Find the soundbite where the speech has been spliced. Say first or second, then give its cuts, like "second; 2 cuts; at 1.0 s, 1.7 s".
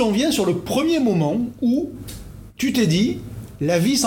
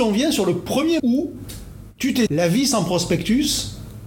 second; 2 cuts; at 1.0 s, 2.3 s